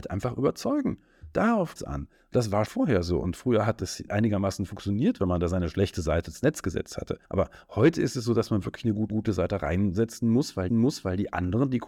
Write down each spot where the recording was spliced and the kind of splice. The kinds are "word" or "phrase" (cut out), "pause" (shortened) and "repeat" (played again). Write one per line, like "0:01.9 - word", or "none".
0:01.8 - word
0:02.7 - word
0:04.1 - word
0:07.2 - pause
0:09.1 - repeat
0:10.7 - repeat